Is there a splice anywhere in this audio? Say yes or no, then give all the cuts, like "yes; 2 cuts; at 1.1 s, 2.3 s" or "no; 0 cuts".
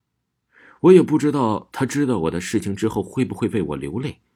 no; 0 cuts